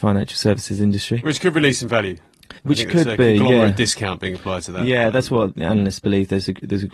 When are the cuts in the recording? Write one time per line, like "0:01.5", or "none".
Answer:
0:02.6